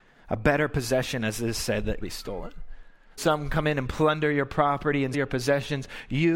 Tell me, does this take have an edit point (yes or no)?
yes